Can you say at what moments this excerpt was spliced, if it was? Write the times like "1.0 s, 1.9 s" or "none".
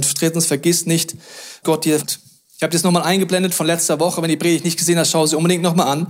1.6 s, 2.0 s